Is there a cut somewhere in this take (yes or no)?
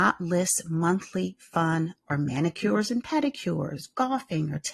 yes